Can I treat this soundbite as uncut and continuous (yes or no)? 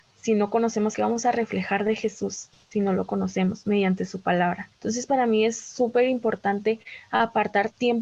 no